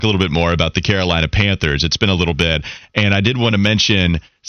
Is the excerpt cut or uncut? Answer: uncut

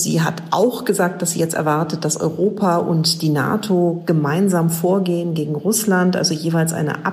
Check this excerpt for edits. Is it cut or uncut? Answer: uncut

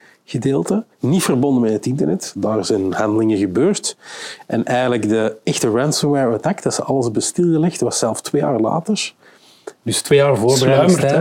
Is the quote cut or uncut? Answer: cut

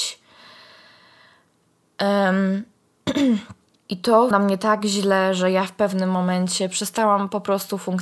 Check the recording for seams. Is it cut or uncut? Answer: cut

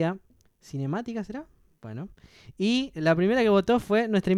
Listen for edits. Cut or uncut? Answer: uncut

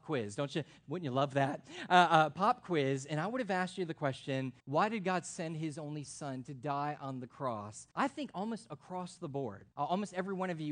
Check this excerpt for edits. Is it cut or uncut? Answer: cut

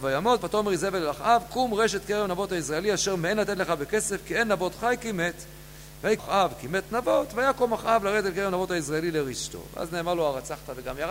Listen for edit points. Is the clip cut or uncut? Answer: cut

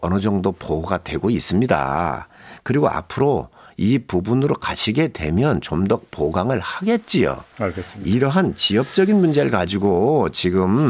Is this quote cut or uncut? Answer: uncut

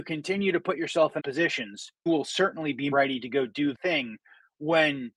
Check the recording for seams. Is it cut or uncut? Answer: cut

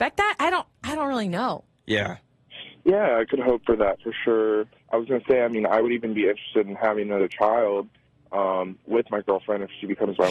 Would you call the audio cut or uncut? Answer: uncut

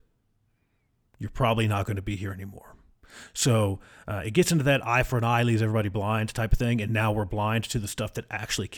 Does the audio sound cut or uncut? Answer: uncut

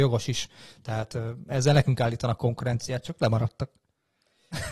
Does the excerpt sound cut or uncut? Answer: uncut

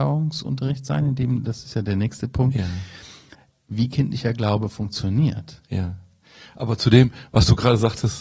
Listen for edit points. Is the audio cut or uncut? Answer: uncut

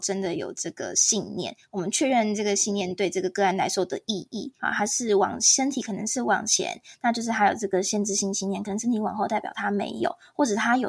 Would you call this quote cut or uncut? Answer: cut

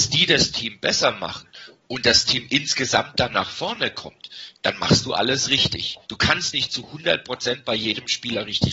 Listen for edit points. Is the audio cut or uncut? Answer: cut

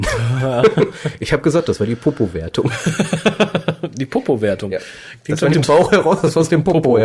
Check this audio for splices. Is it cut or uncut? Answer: cut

